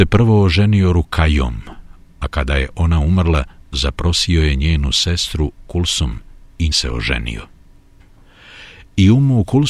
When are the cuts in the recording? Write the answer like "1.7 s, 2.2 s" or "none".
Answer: 5.6 s, 6.7 s